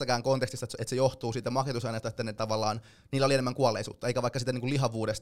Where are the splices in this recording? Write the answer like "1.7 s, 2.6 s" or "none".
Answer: none